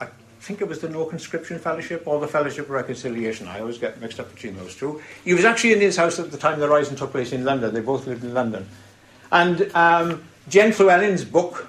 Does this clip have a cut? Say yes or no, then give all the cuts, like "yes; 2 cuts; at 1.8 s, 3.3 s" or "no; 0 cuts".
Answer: no; 0 cuts